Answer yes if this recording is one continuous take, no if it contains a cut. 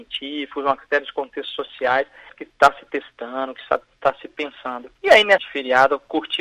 no